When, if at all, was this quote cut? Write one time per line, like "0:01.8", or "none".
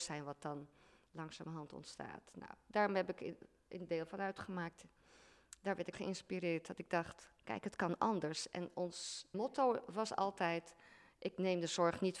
0:05.9
0:07.4
0:09.3

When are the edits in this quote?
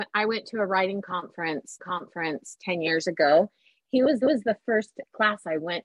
0:01.8
0:04.2

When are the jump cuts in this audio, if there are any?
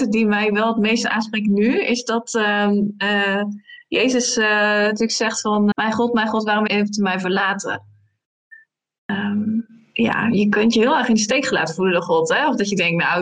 0:05.7
0:06.7

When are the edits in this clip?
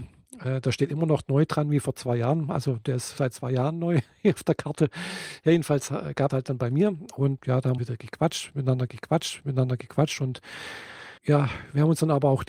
0:03.2
0:06.3
0:07.4
0:07.8
0:08.9
0:11.2

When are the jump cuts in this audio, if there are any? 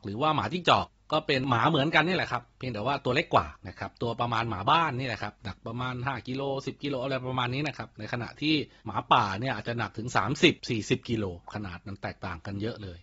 0:05.4

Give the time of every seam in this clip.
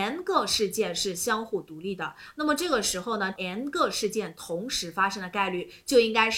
0:03.4

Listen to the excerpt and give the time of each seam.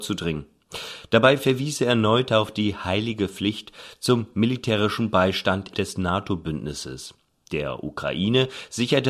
0:05.7

